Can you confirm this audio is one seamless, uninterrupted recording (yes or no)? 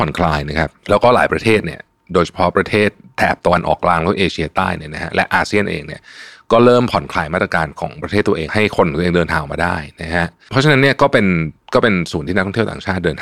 yes